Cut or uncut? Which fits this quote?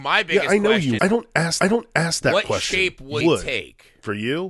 cut